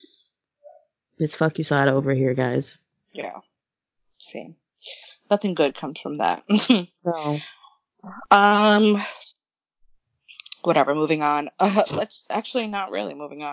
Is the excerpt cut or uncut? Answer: uncut